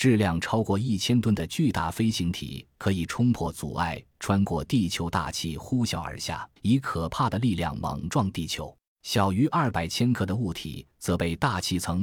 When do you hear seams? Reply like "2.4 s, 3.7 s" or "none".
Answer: 6.6 s, 8.9 s